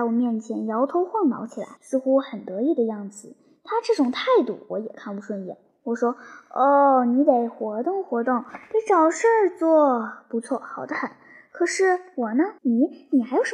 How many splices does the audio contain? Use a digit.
2